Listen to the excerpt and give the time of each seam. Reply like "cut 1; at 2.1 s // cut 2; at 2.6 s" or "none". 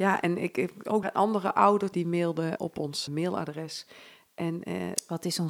cut 1; at 1.0 s // cut 2; at 1.9 s // cut 3; at 2.6 s // cut 4; at 3.1 s